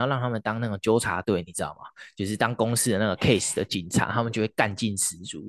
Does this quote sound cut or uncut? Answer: uncut